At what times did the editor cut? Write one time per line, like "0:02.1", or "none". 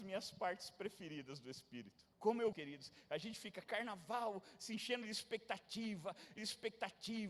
0:02.1
0:02.5
0:03.6
0:06.4